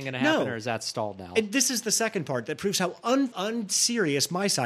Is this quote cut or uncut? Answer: cut